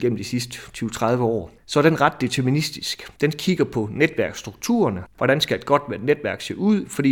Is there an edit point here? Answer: yes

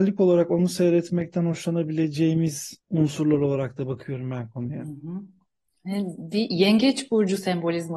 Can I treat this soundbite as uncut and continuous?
no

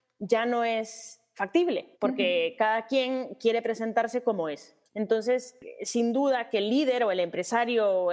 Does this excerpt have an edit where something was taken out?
yes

